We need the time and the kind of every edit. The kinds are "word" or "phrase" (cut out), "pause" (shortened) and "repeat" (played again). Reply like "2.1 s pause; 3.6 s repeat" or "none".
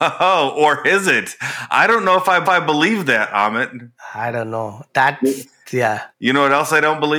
2.5 s repeat; 6.1 s pause